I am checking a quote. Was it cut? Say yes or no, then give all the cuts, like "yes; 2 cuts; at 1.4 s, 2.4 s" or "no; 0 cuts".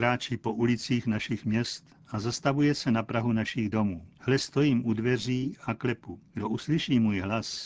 yes; 2 cuts; at 4.1 s, 6.3 s